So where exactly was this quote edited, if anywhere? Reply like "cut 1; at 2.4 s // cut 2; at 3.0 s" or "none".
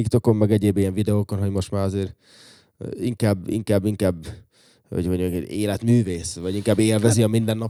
none